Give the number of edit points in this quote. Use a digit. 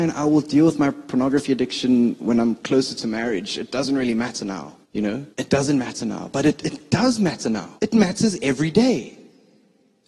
3